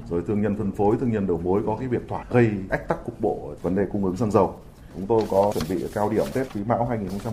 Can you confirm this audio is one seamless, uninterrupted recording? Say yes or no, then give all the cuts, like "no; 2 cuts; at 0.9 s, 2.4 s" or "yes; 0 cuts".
no; 1 cut; at 2.2 s